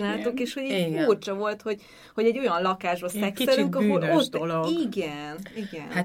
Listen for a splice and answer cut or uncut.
uncut